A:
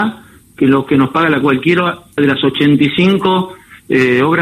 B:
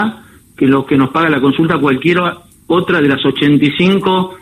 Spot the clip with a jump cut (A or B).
A